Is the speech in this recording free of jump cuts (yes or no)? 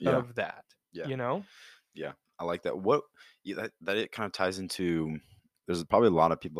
yes